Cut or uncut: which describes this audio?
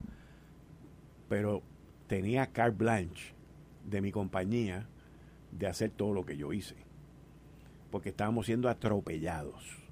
uncut